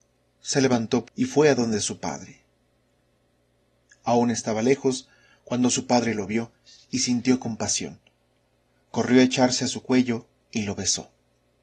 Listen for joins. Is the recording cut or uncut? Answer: cut